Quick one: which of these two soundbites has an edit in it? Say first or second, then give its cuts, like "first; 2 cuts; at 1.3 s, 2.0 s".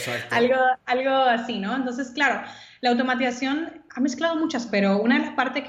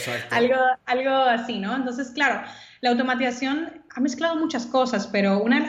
first; 1 cut; at 4.7 s